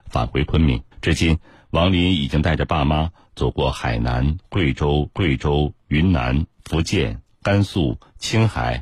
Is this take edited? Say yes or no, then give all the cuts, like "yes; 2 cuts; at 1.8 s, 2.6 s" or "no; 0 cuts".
yes; 2 cuts; at 0.9 s, 5.1 s